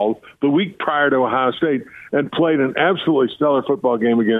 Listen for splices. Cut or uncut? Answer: uncut